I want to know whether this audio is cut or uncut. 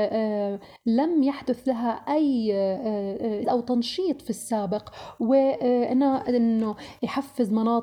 cut